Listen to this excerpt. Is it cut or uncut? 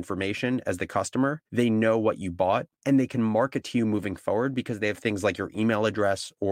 cut